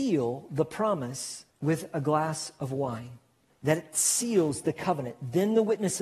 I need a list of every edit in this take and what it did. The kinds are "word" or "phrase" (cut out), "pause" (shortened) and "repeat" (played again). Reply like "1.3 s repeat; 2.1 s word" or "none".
1.5 s pause; 3.5 s pause